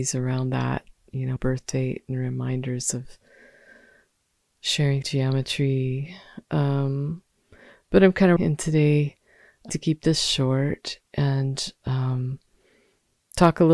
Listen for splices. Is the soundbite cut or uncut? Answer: cut